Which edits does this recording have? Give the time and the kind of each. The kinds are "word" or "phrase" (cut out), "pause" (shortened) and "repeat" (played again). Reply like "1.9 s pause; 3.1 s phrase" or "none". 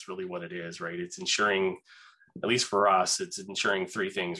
none